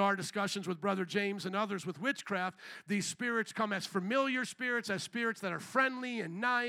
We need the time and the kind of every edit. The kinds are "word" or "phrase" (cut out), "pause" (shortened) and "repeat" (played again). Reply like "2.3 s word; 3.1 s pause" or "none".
none